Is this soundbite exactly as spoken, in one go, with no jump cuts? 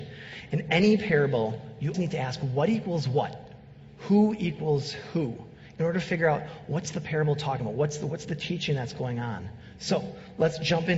no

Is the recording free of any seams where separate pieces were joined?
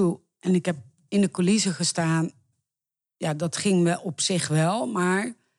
yes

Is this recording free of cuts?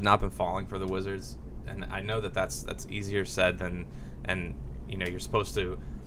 yes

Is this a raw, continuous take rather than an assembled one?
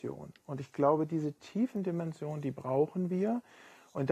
yes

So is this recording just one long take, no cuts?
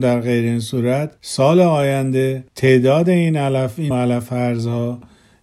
no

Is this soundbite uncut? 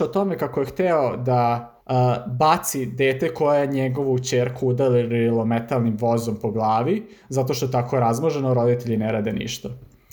no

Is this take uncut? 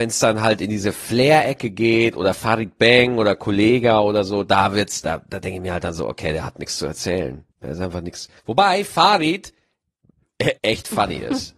no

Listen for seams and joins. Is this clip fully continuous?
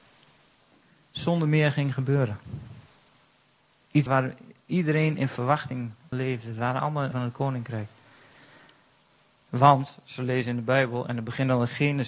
no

